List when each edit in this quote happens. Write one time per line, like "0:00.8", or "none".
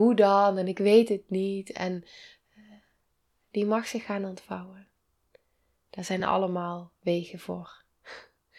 none